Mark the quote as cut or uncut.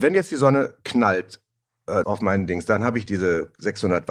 cut